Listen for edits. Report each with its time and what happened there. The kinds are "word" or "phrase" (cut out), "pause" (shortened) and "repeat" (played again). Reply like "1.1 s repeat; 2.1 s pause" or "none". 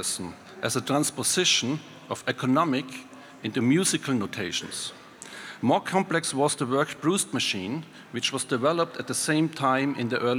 none